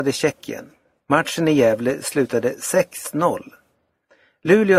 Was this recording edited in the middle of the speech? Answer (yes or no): no